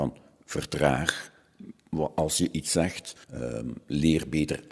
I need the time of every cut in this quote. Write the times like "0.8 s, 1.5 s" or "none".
3.2 s